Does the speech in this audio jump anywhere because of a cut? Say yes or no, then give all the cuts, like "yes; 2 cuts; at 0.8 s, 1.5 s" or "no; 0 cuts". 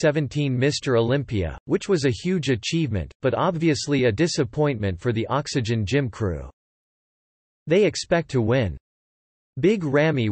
no; 0 cuts